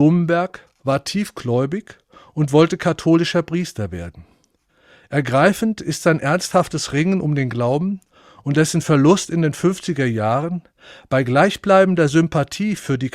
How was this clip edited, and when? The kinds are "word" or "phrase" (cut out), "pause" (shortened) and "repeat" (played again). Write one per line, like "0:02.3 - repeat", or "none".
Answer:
none

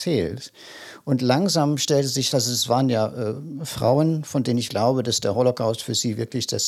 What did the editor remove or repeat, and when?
0:02.3 - word
0:04.7 - word

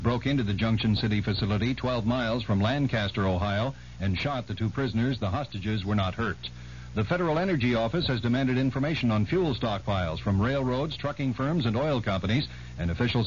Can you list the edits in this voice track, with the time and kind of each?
none

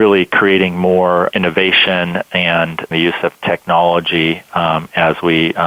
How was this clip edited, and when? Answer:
0:01.3 - word
0:02.9 - phrase

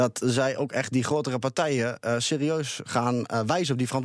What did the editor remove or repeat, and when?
none

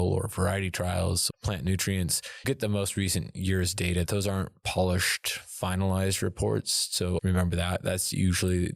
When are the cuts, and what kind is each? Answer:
0:01.3 - word
0:02.4 - word
0:04.1 - word
0:07.2 - word

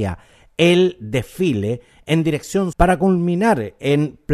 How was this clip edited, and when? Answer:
0:02.7 - word

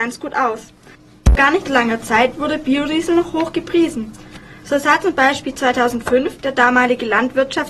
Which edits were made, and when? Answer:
0:01.7 - word

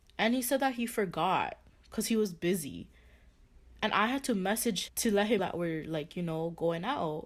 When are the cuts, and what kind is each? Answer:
0:04.9 - word
0:05.4 - word

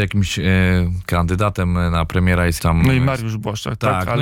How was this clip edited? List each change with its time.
0:02.6 - phrase

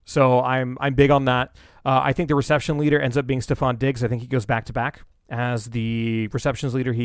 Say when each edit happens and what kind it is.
none

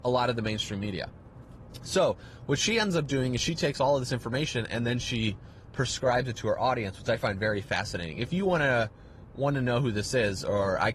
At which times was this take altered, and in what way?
none

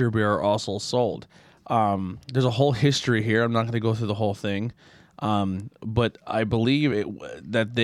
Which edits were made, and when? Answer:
none

